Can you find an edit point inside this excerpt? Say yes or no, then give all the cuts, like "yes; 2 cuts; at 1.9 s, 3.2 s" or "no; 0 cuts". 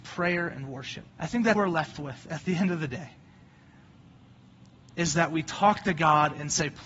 yes; 2 cuts; at 1.1 s, 1.6 s